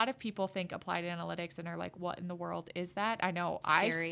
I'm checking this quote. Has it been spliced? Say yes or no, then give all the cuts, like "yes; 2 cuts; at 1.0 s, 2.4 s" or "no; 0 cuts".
no; 0 cuts